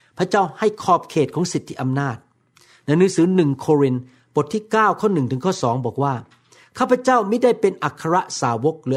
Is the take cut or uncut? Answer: uncut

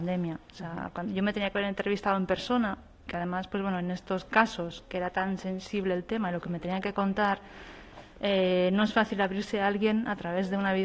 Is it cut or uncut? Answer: uncut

